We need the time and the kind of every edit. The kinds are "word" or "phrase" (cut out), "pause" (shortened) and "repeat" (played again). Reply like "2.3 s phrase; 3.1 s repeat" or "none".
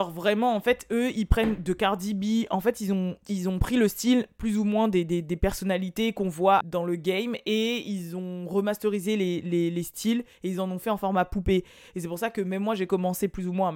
6.6 s word